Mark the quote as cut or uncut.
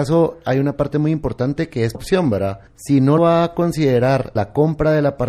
cut